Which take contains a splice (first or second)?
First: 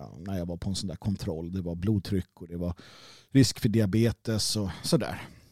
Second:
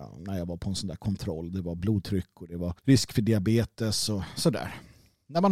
second